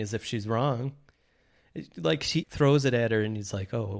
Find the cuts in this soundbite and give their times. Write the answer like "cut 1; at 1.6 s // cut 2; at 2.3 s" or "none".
cut 1; at 2.4 s

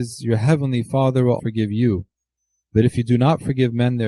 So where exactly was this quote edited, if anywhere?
cut 1; at 1.4 s

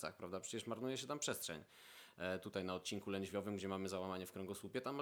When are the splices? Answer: none

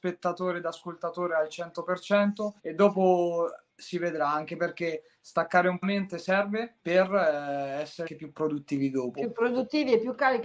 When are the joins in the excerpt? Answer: cut 1; at 2.6 s // cut 2; at 5.8 s // cut 3; at 6.8 s // cut 4; at 8.1 s

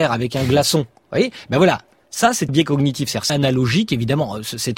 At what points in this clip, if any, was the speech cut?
cut 1; at 2.5 s // cut 2; at 3.3 s

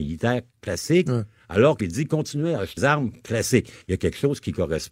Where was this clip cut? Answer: cut 1; at 1.8 s // cut 2; at 2.8 s // cut 3; at 3.8 s

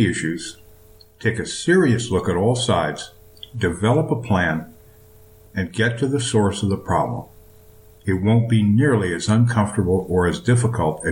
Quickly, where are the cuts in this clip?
none

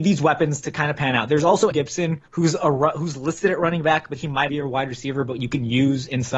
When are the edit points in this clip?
cut 1; at 1.7 s // cut 2; at 2.3 s // cut 3; at 4.5 s

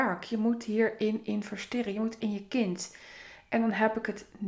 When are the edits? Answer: cut 1; at 2.2 s

